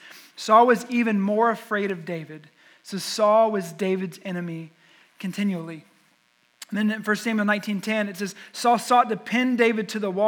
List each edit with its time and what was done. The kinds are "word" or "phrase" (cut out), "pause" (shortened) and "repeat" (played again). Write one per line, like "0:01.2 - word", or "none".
none